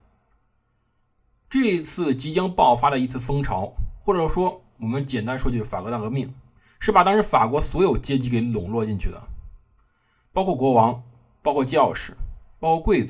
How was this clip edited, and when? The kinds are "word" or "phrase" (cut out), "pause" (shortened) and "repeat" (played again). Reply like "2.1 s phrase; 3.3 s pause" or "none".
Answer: none